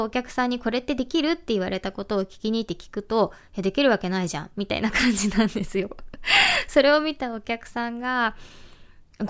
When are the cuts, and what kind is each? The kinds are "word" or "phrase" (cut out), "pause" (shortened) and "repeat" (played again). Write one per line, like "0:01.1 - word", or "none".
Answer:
none